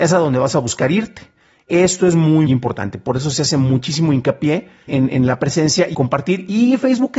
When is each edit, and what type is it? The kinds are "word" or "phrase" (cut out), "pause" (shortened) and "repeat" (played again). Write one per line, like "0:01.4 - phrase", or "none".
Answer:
0:02.5 - word
0:04.9 - word
0:05.9 - word